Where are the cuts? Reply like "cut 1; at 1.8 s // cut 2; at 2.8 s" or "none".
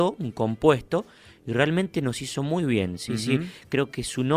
none